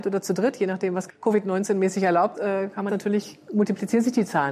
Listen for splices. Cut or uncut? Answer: cut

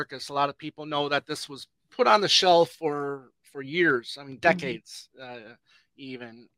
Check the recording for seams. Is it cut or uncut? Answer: uncut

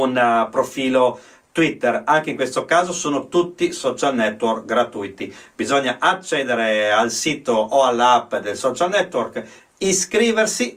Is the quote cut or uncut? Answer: uncut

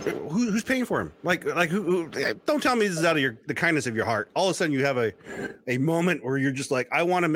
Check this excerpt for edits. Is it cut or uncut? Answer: uncut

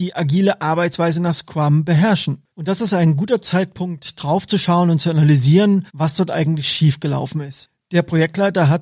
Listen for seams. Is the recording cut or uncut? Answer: cut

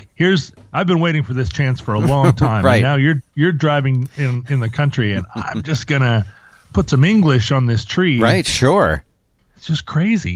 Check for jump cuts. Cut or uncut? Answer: uncut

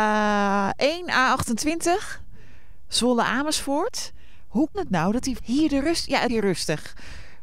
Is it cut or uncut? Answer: cut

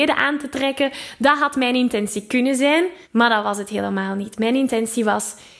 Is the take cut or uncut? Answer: cut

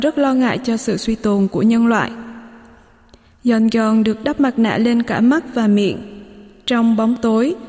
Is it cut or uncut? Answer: uncut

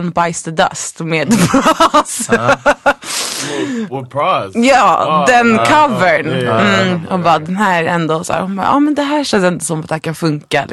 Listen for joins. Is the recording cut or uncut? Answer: uncut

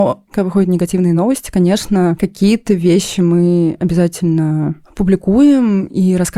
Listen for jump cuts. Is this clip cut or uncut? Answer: uncut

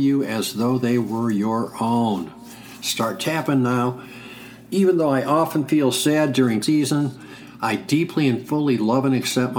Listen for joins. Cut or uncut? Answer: cut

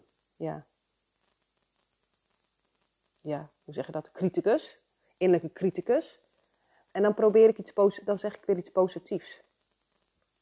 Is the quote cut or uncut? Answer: uncut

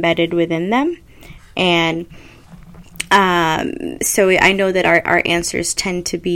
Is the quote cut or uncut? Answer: uncut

